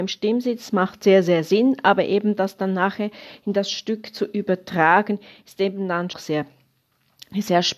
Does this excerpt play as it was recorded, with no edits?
no; 1 cut; at 6.1 s

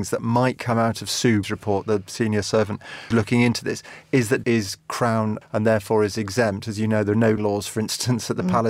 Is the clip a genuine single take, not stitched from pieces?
no; 6 cuts; at 1.4 s, 2.4 s, 3.1 s, 4.4 s, 5.4 s, 7.4 s

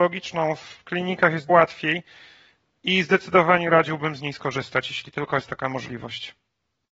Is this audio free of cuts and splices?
no; 1 cut; at 1.5 s

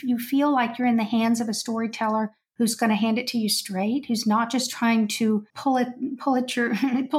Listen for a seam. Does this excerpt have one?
yes; 1 cut; at 5.5 s

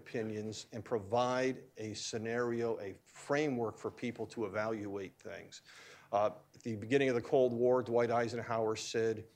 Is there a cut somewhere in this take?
no; 0 cuts

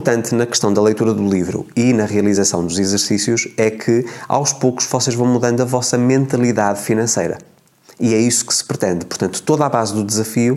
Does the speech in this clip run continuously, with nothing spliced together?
yes; 0 cuts

